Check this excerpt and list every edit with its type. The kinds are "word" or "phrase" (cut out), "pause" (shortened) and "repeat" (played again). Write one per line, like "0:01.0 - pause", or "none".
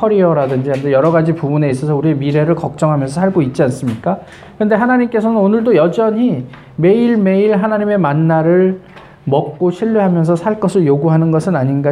none